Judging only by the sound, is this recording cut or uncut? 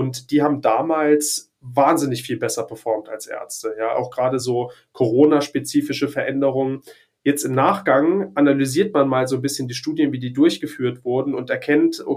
uncut